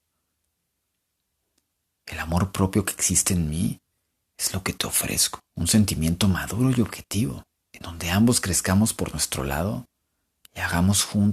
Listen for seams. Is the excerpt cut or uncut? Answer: cut